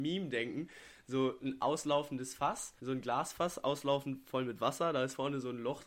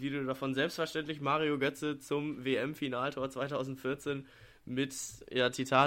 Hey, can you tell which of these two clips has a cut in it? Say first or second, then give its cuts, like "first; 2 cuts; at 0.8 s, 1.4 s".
first; 1 cut; at 2.8 s